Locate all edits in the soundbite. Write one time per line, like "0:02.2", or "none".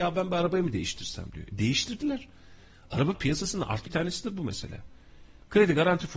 0:03.1
0:03.9